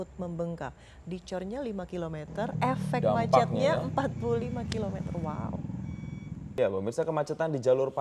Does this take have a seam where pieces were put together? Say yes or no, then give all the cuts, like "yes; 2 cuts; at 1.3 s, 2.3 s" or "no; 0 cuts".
no; 0 cuts